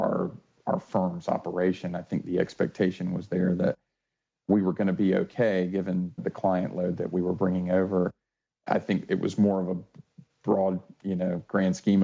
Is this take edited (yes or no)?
yes